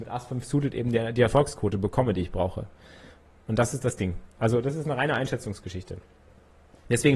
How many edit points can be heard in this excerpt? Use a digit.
0